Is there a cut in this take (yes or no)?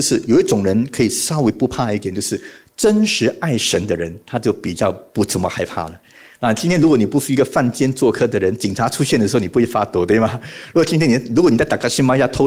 no